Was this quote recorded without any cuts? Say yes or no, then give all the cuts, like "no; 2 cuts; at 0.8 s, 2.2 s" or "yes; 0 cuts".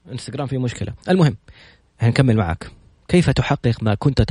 yes; 0 cuts